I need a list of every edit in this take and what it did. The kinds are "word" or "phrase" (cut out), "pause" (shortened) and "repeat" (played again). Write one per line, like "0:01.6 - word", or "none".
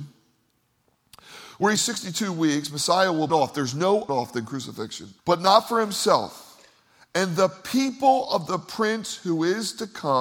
0:01.8 - phrase
0:03.3 - phrase
0:04.1 - phrase
0:05.2 - pause